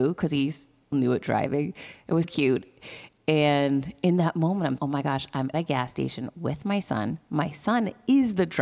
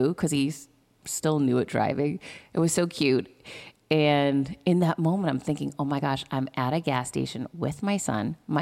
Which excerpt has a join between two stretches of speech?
first; 4 cuts; at 0.9 s, 2.2 s, 4.8 s, 5.5 s

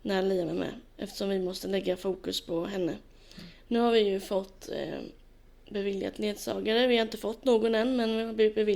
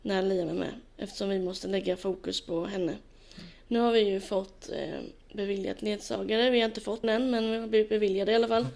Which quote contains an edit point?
second; 2 cuts; at 5.2 s, 7.0 s

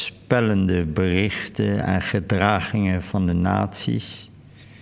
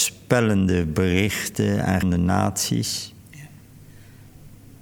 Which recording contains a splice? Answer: second; 2 cuts; at 2.0 s, 3.2 s

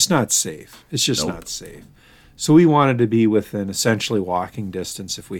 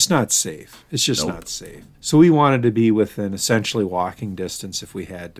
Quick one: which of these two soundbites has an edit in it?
second; 1 cut; at 1.9 s

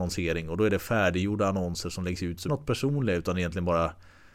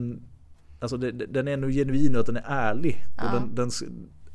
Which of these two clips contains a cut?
first; 1 cut; at 2.5 s

